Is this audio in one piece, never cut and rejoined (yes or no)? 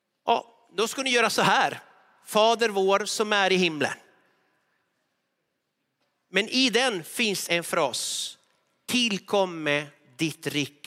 no